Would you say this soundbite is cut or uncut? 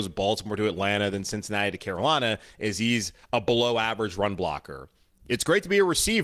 uncut